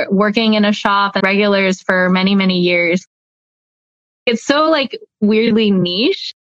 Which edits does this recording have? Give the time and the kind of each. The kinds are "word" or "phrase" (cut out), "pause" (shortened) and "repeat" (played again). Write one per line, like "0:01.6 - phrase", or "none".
0:01.2 - word